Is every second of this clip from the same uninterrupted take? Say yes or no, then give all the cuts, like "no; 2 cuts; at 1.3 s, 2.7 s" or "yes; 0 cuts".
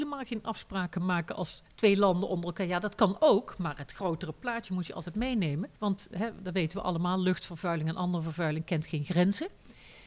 no; 2 cuts; at 1.7 s, 5.8 s